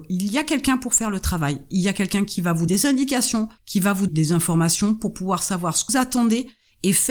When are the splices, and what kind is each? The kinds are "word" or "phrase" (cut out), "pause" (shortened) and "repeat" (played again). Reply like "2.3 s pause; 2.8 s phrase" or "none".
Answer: 2.7 s word; 3.6 s pause; 4.1 s word; 5.9 s word